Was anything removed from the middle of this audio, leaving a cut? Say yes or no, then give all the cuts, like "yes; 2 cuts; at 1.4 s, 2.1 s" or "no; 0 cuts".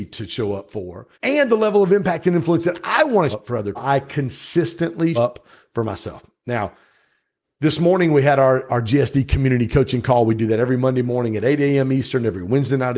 yes; 4 cuts; at 1.1 s, 3.3 s, 3.8 s, 5.2 s